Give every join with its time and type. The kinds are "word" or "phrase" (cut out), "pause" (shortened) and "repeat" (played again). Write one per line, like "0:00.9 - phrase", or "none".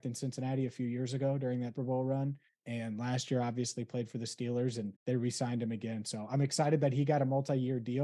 0:01.7 - word
0:02.4 - pause
0:05.0 - pause